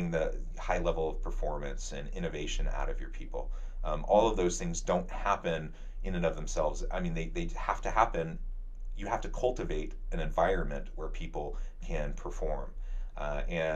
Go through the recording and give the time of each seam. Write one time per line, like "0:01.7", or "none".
none